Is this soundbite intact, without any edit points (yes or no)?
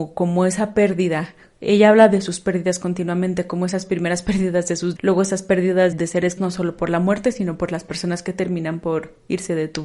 no